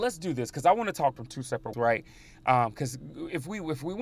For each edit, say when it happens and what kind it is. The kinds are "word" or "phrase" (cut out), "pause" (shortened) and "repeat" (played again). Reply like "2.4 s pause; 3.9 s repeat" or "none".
1.2 s word; 1.7 s word